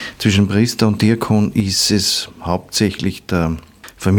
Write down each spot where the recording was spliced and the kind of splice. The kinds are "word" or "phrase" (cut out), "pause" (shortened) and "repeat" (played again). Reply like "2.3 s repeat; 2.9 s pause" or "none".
none